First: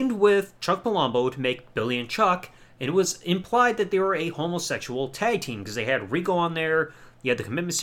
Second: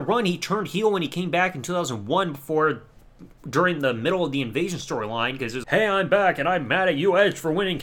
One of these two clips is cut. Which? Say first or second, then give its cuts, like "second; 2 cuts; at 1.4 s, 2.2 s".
second; 1 cut; at 5.6 s